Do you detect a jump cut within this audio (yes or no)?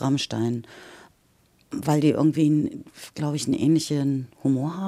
no